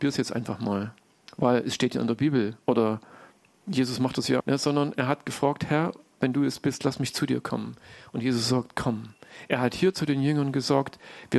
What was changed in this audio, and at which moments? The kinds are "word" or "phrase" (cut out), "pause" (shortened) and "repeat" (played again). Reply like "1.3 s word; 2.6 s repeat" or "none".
4.4 s word